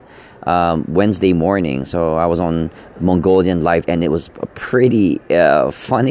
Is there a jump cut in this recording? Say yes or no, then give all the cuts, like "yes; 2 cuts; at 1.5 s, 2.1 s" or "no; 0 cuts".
yes; 1 cut; at 3.9 s